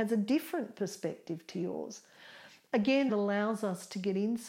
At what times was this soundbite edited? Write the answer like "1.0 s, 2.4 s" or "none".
3.1 s